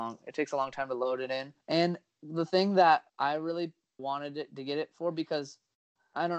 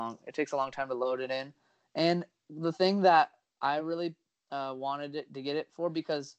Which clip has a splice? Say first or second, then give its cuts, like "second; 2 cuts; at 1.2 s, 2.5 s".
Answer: first; 3 cuts; at 1.6 s, 3.1 s, 4.0 s